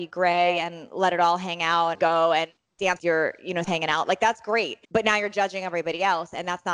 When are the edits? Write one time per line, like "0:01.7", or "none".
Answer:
0:01.9
0:03.0
0:03.6
0:04.8